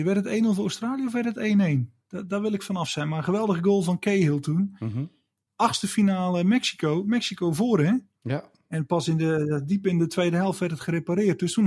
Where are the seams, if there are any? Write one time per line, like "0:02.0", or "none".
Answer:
none